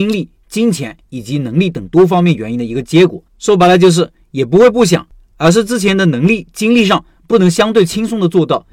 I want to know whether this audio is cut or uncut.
cut